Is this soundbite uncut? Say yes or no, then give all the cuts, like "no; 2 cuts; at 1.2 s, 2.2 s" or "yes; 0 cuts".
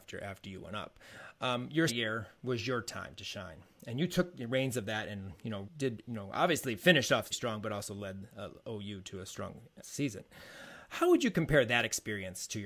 no; 4 cuts; at 1.9 s, 5.6 s, 7.3 s, 9.8 s